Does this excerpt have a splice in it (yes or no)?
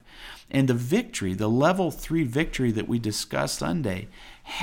yes